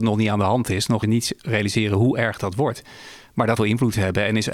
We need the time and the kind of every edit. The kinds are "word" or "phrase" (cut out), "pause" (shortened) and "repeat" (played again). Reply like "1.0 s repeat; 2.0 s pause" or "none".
1.0 s word; 3.6 s phrase